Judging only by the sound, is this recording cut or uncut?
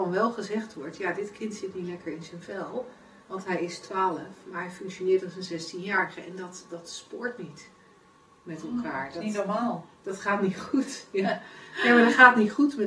uncut